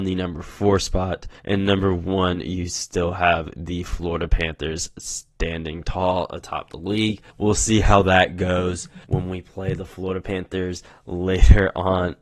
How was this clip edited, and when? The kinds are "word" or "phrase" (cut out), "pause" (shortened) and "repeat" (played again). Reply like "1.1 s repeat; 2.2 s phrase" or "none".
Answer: 1.4 s pause; 7.3 s pause; 9.0 s pause